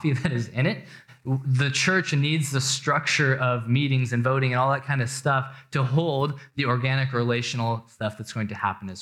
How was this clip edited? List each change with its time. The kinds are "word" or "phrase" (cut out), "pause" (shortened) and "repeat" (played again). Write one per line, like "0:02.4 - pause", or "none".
none